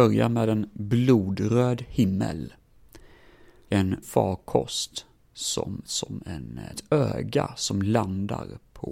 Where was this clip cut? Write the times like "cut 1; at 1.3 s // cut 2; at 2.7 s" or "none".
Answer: cut 1; at 3.7 s // cut 2; at 4.0 s // cut 3; at 5.9 s // cut 4; at 6.7 s

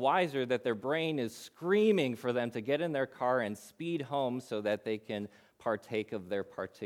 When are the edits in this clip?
none

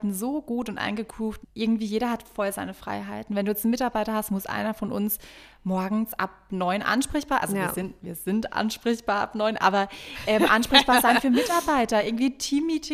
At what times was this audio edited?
cut 1; at 1.4 s

